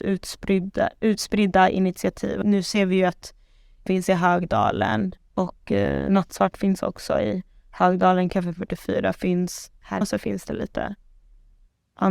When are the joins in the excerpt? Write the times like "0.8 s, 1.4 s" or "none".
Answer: 2.4 s, 3.9 s, 5.2 s, 10.0 s